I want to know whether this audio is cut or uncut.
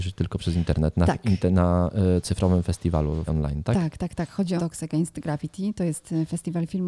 cut